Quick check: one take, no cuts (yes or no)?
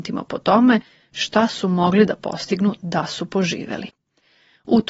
yes